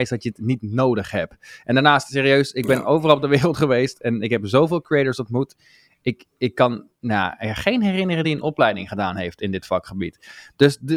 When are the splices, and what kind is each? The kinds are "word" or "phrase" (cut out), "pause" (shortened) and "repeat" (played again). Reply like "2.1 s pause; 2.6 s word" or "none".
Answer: none